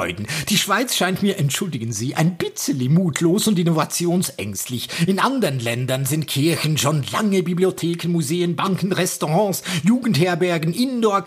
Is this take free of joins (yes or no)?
yes